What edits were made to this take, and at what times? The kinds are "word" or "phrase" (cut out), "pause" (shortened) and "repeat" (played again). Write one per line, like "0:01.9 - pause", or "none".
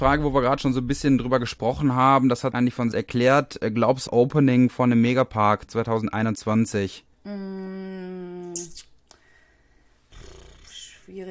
0:02.5 - word
0:02.9 - word
0:04.1 - phrase
0:07.1 - pause